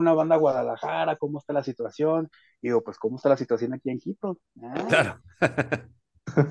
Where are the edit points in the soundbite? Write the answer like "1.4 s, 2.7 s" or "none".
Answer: none

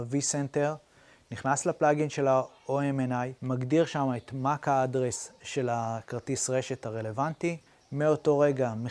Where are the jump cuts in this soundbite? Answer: 3.4 s, 7.7 s

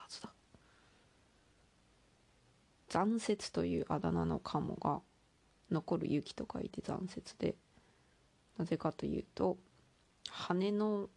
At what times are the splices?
none

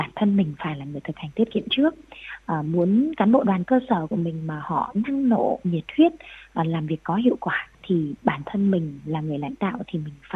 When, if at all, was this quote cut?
7.7 s

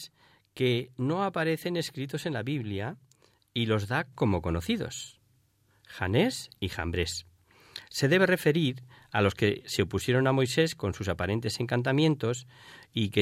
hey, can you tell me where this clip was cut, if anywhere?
none

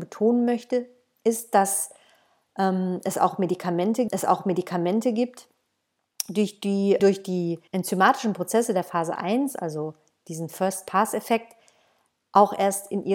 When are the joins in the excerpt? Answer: 4.1 s, 7.0 s, 7.7 s

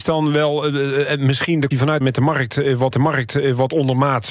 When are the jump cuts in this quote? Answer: 1.7 s, 2.0 s, 2.9 s

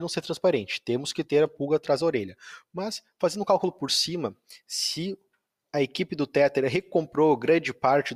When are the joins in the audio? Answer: none

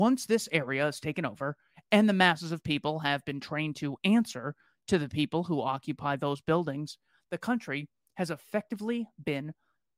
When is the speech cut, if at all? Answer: none

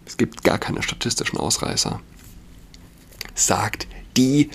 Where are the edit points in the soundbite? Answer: none

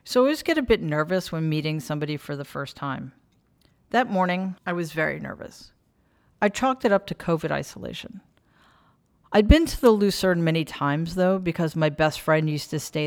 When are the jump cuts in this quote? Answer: 4.6 s

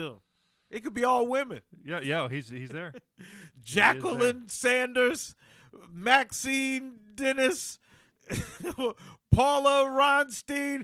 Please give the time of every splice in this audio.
none

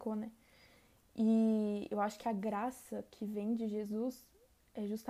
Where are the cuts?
none

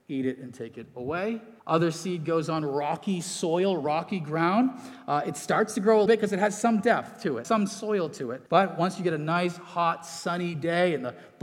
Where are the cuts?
1.6 s, 6.1 s, 7.4 s, 8.5 s

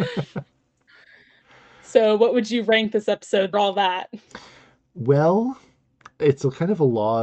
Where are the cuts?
3.5 s

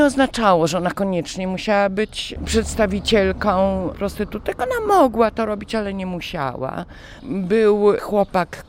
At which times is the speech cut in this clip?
3.9 s

